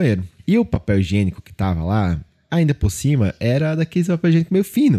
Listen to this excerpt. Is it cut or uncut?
uncut